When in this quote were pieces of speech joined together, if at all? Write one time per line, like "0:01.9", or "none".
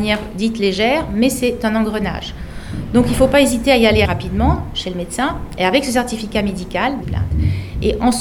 0:04.0
0:07.0